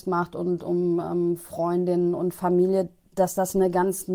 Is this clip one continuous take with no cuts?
yes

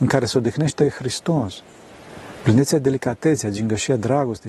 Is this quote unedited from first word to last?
yes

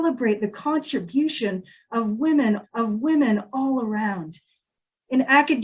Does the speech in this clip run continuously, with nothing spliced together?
no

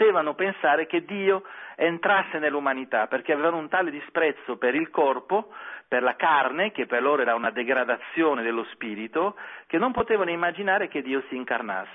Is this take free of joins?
yes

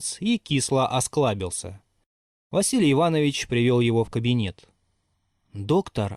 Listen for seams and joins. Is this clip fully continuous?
yes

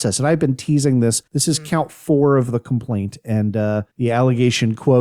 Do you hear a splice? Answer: yes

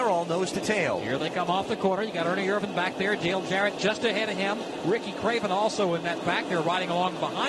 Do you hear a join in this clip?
no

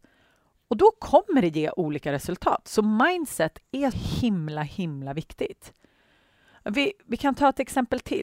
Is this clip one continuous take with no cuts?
no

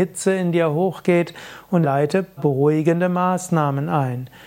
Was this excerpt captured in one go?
no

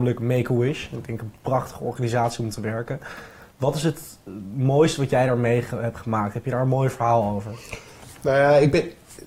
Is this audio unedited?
yes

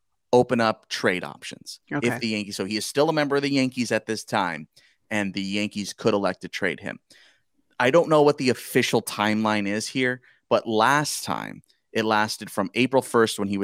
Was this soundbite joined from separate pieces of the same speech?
no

